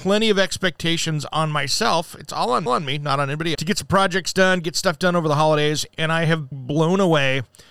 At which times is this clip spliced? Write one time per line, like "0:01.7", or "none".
0:02.7
0:03.5
0:06.5